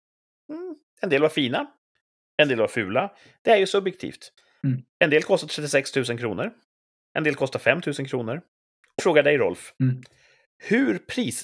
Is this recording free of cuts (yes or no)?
no